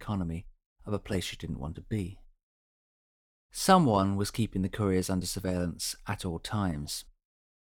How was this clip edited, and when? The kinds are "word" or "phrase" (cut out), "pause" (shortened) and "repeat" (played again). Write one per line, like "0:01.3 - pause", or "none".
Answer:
none